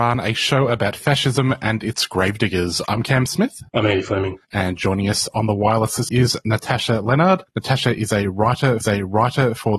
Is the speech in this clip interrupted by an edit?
yes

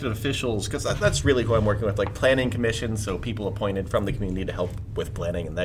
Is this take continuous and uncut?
yes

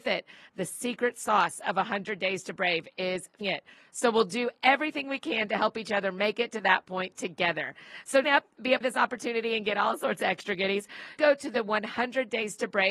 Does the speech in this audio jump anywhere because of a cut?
yes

